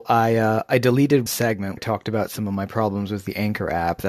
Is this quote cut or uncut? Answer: cut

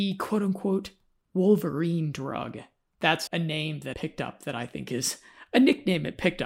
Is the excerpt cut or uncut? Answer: cut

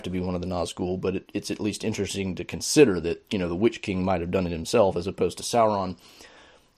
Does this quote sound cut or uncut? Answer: uncut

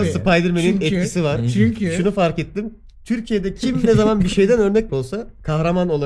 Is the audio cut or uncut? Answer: cut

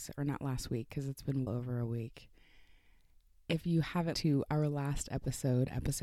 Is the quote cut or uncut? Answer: cut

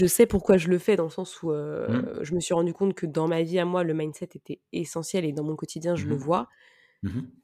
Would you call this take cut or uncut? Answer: uncut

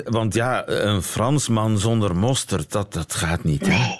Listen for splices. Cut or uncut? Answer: uncut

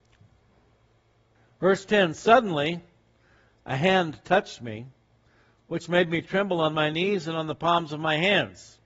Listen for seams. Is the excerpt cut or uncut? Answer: uncut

